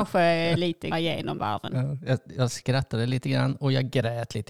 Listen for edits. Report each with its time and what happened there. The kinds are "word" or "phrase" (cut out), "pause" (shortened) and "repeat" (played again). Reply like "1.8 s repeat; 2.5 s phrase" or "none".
0.9 s word; 1.4 s word

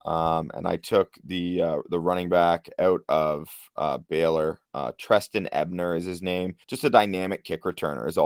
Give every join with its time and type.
4.6 s pause; 6.6 s pause

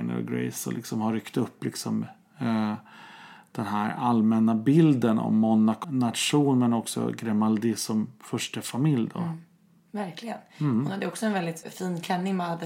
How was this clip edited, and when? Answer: 5.8 s word; 11.6 s word

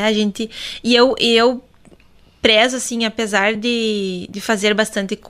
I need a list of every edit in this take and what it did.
none

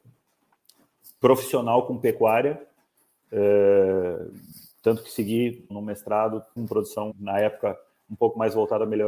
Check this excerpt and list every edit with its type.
5.7 s word; 6.6 s word; 7.1 s word

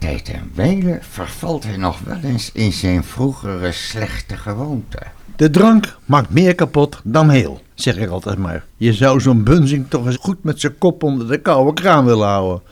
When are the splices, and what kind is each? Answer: 7.7 s pause; 8.7 s pause; 10.1 s word

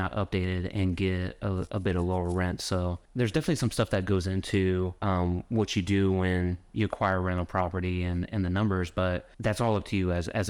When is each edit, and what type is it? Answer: 3.1 s pause; 5.0 s pause; 9.3 s pause

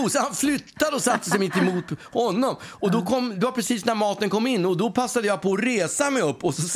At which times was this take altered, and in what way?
none

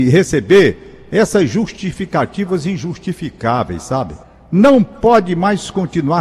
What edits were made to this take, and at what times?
4.2 s pause

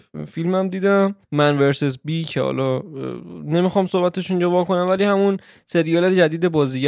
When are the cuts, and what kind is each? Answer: 1.2 s pause

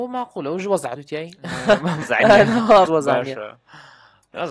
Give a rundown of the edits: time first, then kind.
1.0 s word; 2.0 s word; 2.9 s word

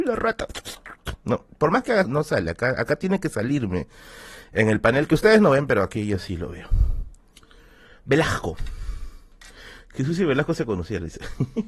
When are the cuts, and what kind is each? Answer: 2.0 s word

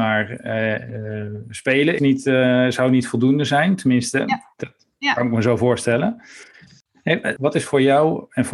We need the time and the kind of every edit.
2.0 s word

